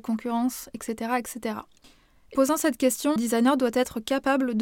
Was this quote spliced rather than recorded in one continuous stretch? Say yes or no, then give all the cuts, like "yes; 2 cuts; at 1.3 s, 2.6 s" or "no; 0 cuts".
yes; 2 cuts; at 2.3 s, 3.2 s